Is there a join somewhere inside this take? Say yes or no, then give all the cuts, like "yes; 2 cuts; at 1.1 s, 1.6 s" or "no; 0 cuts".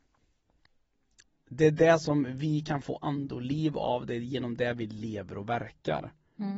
no; 0 cuts